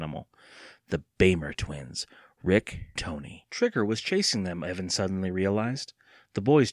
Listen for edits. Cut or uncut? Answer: cut